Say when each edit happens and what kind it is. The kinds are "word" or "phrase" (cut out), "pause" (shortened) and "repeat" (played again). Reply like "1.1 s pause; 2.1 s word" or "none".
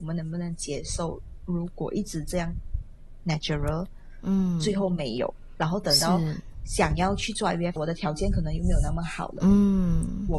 3.2 s word; 7.8 s phrase